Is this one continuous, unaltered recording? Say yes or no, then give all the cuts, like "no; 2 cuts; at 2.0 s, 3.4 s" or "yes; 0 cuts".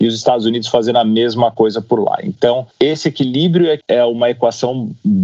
no; 2 cuts; at 2.7 s, 3.8 s